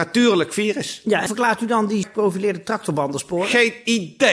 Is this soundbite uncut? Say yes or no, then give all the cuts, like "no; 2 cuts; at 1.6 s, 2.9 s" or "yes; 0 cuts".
no; 2 cuts; at 1.3 s, 2.0 s